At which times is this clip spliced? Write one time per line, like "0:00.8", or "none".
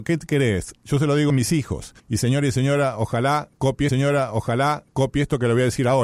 0:01.3
0:02.0
0:03.9